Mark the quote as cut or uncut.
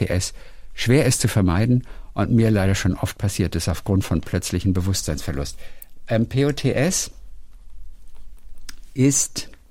uncut